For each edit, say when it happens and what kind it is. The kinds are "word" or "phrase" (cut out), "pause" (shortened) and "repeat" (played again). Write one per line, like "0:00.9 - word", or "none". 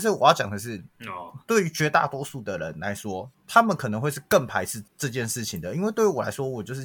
0:04.9 - pause